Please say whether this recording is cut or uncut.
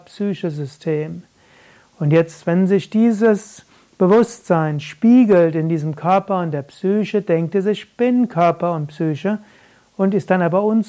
uncut